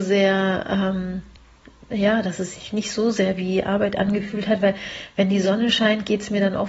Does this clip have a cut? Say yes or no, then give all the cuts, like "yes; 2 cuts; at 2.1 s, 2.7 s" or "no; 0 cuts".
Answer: no; 0 cuts